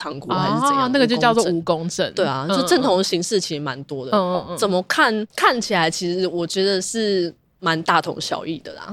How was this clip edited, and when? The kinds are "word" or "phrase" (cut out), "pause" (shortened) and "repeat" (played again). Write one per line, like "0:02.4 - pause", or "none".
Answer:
0:05.3 - pause